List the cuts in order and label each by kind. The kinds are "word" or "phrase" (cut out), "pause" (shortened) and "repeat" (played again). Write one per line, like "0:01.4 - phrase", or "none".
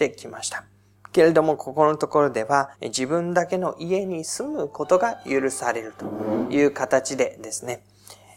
0:02.7 - pause